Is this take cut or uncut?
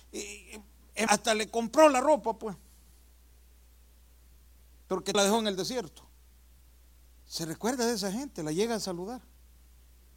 cut